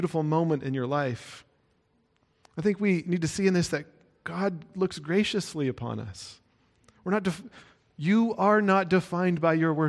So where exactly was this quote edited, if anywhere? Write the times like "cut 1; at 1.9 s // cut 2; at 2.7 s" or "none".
none